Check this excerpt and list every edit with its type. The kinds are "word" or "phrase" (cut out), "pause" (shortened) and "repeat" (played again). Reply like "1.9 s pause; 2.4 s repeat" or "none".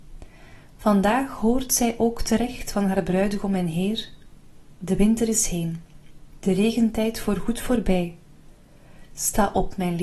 none